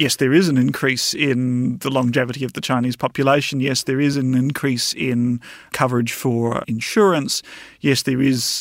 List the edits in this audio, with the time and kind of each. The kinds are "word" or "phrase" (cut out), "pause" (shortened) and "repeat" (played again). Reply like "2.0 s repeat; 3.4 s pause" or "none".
none